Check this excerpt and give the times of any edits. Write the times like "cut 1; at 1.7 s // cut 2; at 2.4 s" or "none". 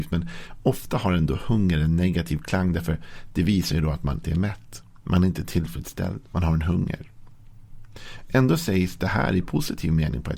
cut 1; at 4.2 s